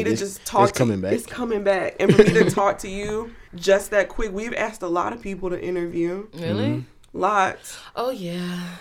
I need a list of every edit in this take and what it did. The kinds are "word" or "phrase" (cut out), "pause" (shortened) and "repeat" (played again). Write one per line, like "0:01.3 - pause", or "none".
0:03.5 - pause